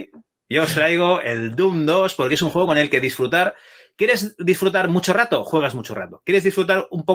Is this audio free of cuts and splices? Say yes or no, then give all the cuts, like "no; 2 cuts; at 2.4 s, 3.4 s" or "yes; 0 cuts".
yes; 0 cuts